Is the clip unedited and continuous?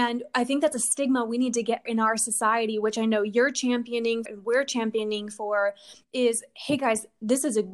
no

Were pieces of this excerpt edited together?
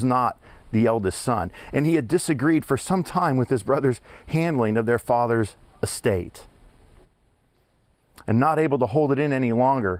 no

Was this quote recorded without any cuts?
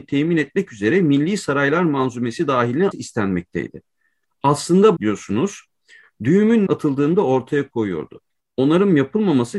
no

